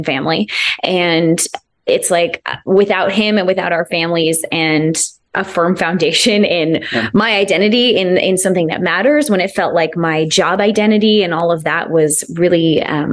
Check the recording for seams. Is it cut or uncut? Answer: uncut